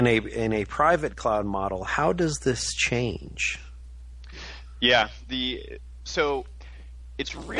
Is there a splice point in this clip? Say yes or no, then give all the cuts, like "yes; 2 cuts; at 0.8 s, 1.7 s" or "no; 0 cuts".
no; 0 cuts